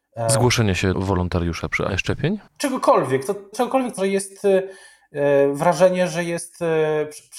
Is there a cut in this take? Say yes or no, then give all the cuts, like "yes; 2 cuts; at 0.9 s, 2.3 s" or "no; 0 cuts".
yes; 5 cuts; at 0.9 s, 1.9 s, 2.5 s, 3.5 s, 4.0 s